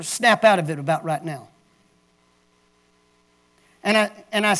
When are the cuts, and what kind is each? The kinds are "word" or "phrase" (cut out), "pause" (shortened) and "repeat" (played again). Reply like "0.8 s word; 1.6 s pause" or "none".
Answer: none